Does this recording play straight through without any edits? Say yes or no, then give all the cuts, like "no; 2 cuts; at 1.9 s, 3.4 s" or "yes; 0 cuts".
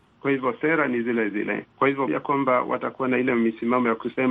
no; 2 cuts; at 1.7 s, 2.1 s